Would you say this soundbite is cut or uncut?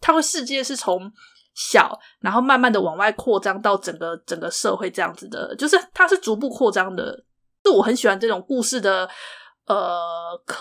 uncut